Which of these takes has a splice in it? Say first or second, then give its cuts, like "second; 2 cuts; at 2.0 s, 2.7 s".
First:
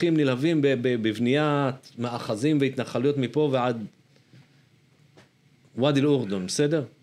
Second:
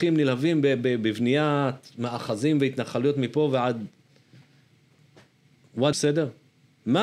second; 1 cut; at 5.9 s